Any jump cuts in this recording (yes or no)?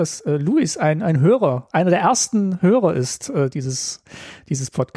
no